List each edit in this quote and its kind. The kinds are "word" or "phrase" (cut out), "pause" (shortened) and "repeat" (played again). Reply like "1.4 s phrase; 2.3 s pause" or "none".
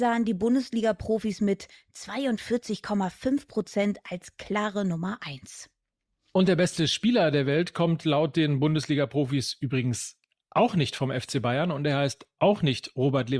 none